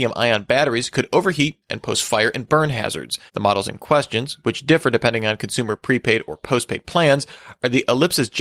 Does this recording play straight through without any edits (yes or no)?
no